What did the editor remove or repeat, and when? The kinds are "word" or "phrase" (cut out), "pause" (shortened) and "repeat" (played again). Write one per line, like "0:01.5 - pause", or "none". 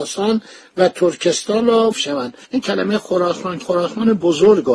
0:01.9 - word
0:02.4 - pause
0:03.6 - word